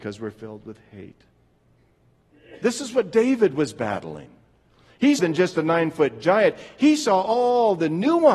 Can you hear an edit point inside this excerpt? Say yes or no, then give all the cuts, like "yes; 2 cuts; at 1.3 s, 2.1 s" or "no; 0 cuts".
yes; 1 cut; at 5.2 s